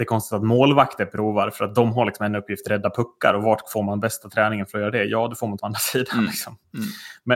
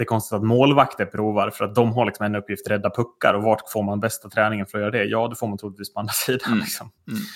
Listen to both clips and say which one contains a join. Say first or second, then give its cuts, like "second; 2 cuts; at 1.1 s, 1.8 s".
first; 1 cut; at 5.6 s